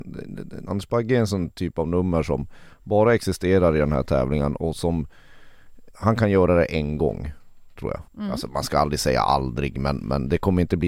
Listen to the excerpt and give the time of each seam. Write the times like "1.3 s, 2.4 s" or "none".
4.6 s, 5.9 s, 8.1 s